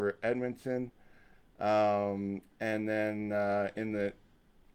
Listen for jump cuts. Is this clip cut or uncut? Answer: uncut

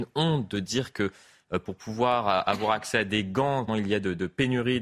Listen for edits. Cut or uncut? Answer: cut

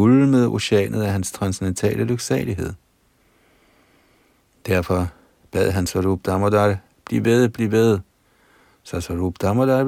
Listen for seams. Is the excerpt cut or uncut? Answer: uncut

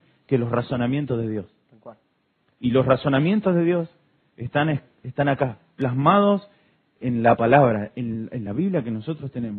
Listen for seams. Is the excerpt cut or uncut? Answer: uncut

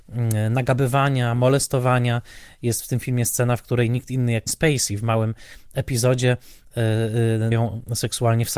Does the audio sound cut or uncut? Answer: cut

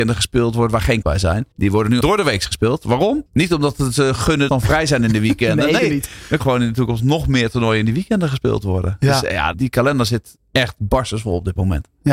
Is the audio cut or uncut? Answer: cut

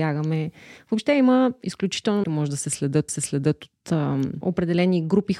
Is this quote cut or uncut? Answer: cut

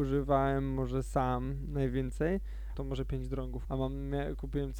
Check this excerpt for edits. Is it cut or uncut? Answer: cut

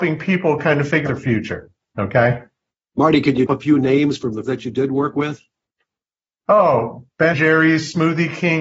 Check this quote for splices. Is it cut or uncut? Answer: cut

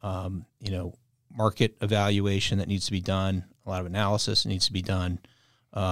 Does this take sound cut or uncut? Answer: uncut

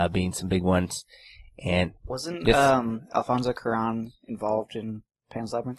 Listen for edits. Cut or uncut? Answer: cut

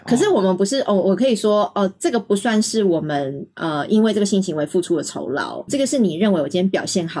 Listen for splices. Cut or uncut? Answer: cut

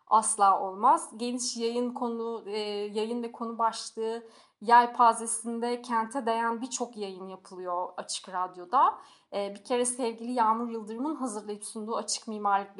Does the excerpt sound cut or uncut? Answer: uncut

